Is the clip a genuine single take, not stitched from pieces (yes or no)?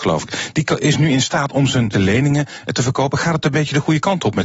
no